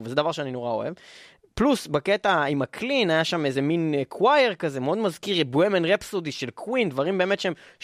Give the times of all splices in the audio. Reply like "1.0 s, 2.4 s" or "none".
none

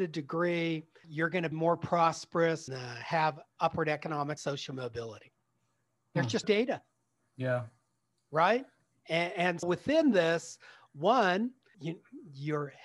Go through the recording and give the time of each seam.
1.0 s, 1.5 s, 2.7 s, 4.4 s, 6.4 s, 9.6 s, 11.7 s

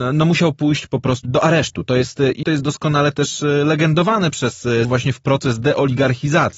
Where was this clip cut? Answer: 1.2 s, 2.4 s, 4.8 s

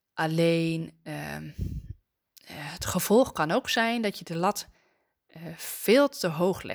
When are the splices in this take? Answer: none

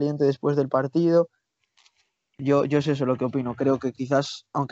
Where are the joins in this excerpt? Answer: none

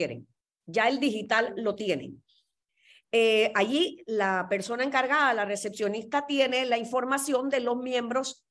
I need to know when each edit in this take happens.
none

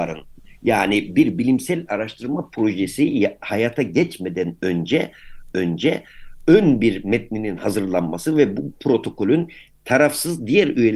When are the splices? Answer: 5.5 s

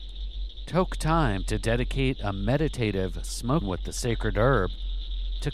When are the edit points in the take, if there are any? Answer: 3.6 s

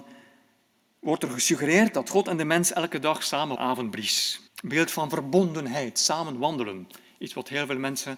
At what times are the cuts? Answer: 3.6 s, 4.5 s

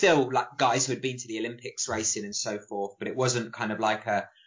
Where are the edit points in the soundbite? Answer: none

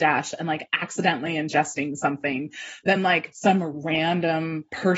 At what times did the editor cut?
none

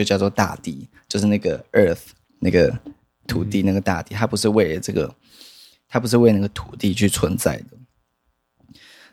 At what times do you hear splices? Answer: none

